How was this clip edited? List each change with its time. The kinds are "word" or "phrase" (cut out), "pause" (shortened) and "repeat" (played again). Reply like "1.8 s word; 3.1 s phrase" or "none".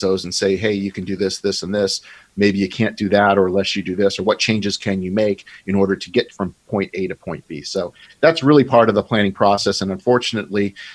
none